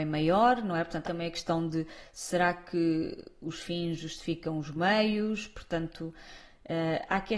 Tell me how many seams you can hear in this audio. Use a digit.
1